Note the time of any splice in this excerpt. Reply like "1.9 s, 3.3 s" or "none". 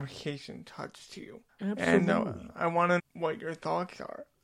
1.5 s, 3.0 s